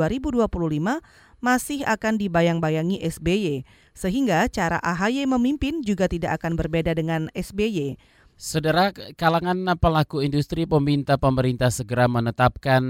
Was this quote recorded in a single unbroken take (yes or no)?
yes